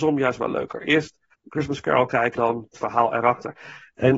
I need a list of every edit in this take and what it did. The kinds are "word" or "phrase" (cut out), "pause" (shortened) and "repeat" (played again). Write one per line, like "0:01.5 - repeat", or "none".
0:01.3 - pause
0:02.4 - word
0:02.7 - word